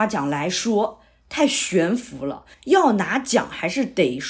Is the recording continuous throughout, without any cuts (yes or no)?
no